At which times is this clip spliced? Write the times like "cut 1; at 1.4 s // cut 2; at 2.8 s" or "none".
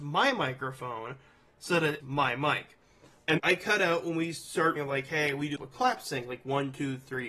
cut 1; at 2.0 s // cut 2; at 3.4 s // cut 3; at 4.8 s // cut 4; at 5.6 s

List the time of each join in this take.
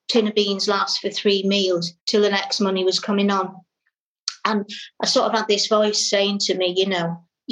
cut 1; at 2.0 s

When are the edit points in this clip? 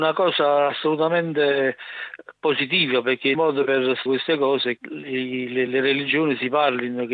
cut 1; at 3.3 s // cut 2; at 4.1 s // cut 3; at 4.8 s // cut 4; at 5.7 s

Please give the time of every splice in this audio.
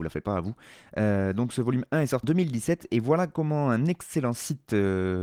cut 1; at 2.2 s

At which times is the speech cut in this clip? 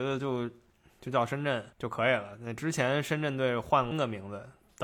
cut 1; at 1.7 s // cut 2; at 3.9 s

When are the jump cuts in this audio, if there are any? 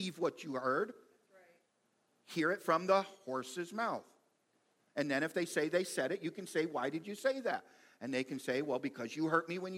none

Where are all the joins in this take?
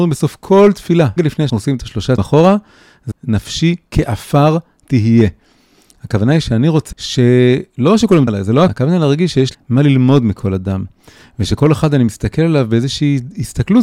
cut 1; at 1.2 s // cut 2; at 1.5 s // cut 3; at 2.2 s // cut 4; at 3.1 s // cut 5; at 4.8 s // cut 6; at 6.9 s // cut 7; at 8.3 s // cut 8; at 8.7 s // cut 9; at 9.5 s

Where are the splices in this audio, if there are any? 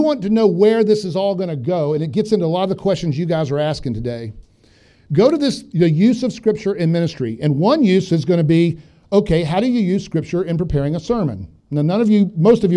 none

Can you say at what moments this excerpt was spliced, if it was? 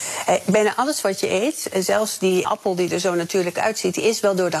cut 1; at 2.4 s

